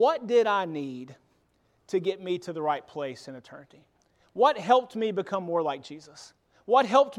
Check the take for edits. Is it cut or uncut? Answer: uncut